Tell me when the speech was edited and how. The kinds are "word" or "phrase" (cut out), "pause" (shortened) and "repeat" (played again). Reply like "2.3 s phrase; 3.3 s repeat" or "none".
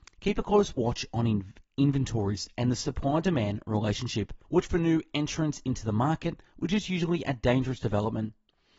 4.4 s pause